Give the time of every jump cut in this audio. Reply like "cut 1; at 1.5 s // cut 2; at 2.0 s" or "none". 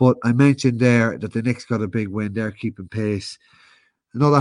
none

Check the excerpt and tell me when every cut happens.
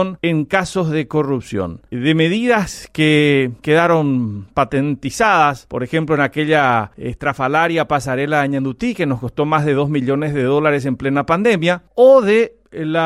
cut 1; at 3.6 s

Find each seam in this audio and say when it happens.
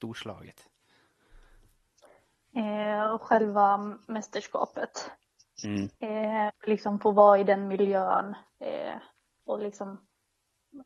cut 1; at 5.9 s

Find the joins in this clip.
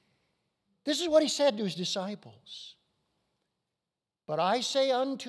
none

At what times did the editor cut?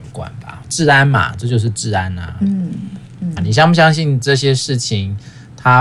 cut 1; at 3.4 s

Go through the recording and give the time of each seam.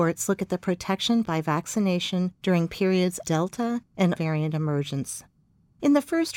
cut 1; at 1.2 s // cut 2; at 3.2 s // cut 3; at 4.2 s

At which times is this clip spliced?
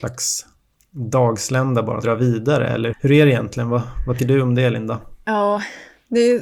cut 1; at 2.0 s // cut 2; at 2.9 s // cut 3; at 4.2 s

